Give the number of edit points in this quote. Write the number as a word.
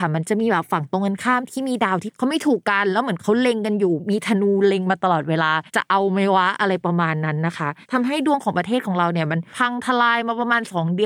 two